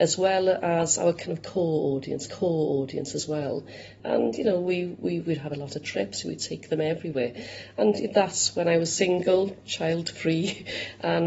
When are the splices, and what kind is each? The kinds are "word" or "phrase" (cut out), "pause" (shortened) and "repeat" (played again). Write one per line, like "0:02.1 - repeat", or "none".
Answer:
0:02.3 - repeat